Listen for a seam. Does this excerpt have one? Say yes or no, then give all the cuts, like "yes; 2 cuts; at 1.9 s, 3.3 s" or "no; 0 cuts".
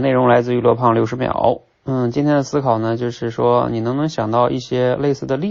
no; 0 cuts